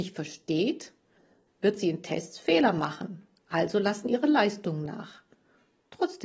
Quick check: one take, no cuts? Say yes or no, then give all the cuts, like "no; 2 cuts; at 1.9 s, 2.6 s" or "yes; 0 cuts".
yes; 0 cuts